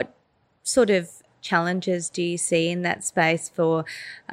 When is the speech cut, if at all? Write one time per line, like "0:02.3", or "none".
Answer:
none